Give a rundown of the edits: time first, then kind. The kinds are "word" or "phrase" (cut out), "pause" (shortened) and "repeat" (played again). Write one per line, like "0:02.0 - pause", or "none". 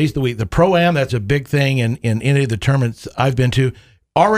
0:01.1 - word